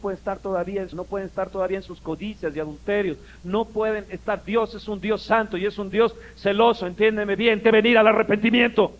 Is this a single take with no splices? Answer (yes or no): no